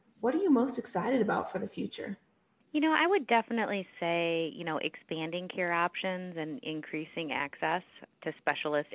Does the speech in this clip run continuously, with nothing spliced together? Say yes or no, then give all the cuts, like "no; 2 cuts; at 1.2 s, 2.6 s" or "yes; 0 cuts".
yes; 0 cuts